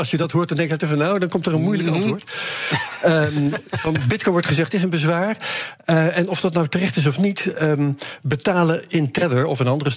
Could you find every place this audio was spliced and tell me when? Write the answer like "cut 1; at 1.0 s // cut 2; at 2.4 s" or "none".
cut 1; at 4.7 s